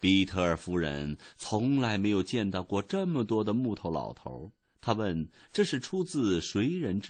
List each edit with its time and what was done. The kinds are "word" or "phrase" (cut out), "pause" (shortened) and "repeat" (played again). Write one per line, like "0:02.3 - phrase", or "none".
0:04.6 - pause